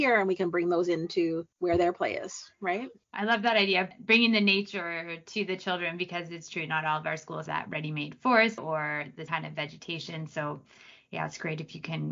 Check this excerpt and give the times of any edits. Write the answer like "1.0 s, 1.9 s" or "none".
1.5 s, 7.5 s, 8.6 s, 9.3 s